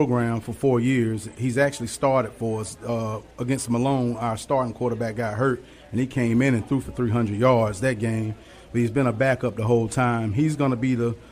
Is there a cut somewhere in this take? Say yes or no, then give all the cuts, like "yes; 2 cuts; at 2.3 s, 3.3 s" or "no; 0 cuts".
no; 0 cuts